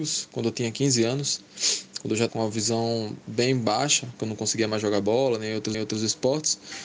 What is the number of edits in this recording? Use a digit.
2